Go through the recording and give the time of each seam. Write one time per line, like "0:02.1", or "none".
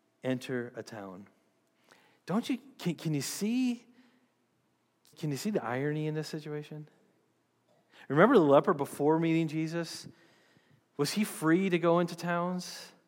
0:02.9
0:05.1